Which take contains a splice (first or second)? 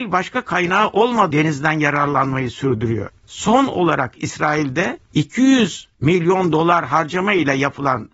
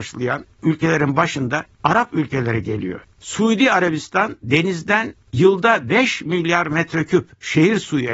first